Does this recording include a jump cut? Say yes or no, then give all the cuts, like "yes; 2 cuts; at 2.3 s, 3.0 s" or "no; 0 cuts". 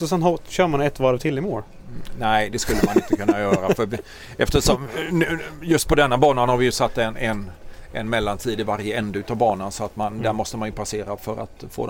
no; 0 cuts